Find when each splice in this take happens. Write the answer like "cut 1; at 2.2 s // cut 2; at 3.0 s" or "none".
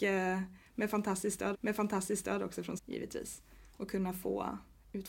cut 1; at 1.5 s // cut 2; at 2.8 s